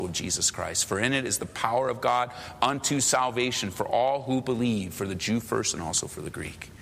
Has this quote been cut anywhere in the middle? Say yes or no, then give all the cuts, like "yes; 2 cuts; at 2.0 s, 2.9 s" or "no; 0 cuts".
no; 0 cuts